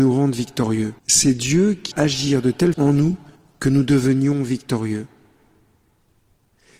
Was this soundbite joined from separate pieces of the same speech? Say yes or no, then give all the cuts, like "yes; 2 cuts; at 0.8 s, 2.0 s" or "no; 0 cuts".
yes; 4 cuts; at 1.0 s, 1.9 s, 2.7 s, 3.4 s